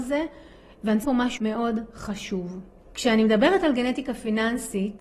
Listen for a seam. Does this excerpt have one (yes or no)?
yes